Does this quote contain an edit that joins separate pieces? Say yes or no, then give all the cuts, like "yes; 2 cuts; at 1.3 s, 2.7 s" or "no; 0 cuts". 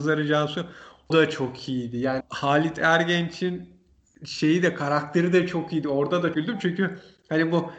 yes; 3 cuts; at 1.1 s, 2.2 s, 6.3 s